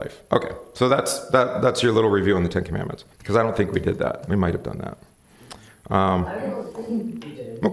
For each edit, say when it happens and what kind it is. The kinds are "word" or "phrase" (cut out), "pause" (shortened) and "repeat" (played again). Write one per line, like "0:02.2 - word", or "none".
0:03.1 - pause